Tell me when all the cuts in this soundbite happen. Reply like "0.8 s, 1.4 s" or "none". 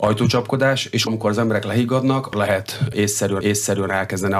1.1 s, 2.3 s, 3.4 s